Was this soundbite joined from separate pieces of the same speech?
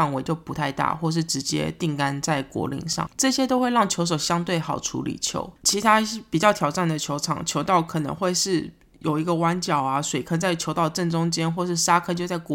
no; 0 cuts

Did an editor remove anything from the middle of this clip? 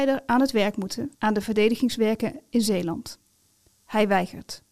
yes; 1 cut; at 1.1 s

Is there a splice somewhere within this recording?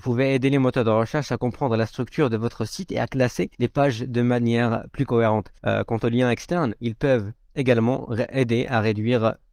yes; 2 cuts; at 3.5 s, 5.6 s

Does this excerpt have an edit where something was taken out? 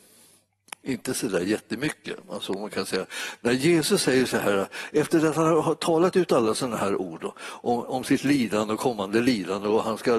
no; 0 cuts

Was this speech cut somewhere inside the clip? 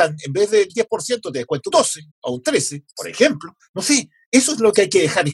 yes; 3 cuts; at 1.7 s, 2.1 s, 3.6 s

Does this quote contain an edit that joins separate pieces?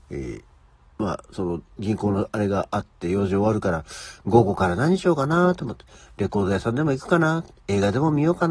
no; 0 cuts

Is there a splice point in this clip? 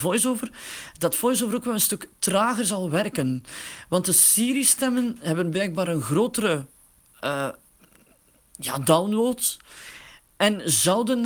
no; 0 cuts

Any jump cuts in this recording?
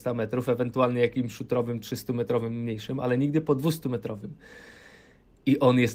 no; 0 cuts

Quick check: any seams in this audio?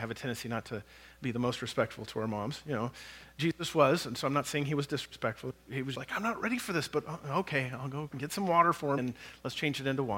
yes; 3 cuts; at 5.9 s, 8.1 s, 9.0 s

